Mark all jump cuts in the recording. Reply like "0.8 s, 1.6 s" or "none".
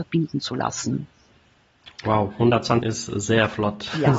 2.8 s